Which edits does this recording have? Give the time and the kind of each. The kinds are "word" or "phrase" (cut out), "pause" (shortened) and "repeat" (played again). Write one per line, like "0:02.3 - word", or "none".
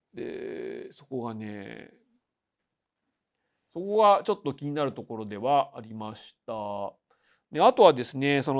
none